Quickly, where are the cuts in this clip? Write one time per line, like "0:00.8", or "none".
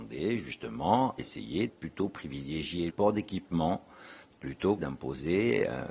0:01.2
0:01.7
0:02.9
0:04.3
0:04.8